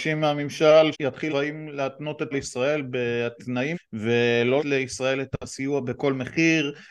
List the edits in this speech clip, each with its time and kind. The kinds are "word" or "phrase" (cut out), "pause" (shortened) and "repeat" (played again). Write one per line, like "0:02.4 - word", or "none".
0:00.9 - word
0:01.3 - word
0:02.3 - word
0:03.7 - word
0:04.6 - word